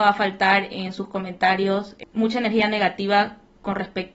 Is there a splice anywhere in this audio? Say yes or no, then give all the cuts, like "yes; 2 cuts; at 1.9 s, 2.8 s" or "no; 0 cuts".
no; 0 cuts